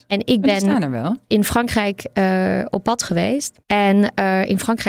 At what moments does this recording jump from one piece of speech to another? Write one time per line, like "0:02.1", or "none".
0:03.6